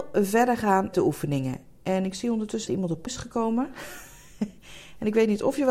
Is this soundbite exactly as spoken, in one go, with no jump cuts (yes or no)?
no